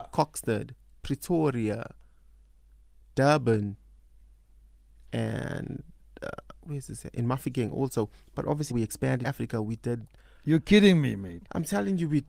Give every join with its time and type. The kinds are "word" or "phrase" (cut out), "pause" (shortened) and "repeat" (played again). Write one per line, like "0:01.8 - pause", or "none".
0:08.7 - word
0:09.2 - word